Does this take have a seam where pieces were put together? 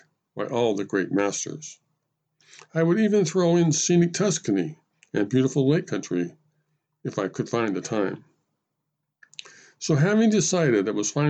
no; 0 cuts

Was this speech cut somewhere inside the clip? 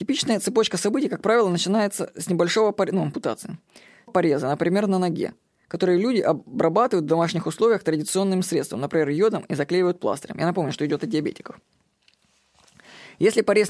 yes; 1 cut; at 4.1 s

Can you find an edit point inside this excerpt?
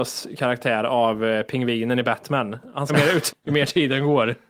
yes; 2 cuts; at 2.9 s, 3.3 s

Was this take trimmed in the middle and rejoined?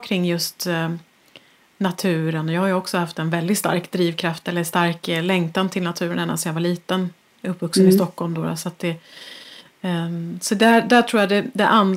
no; 0 cuts

